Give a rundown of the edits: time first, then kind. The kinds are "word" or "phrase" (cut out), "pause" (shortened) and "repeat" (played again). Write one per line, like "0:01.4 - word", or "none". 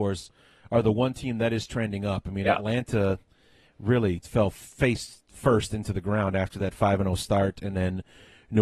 0:04.2 - word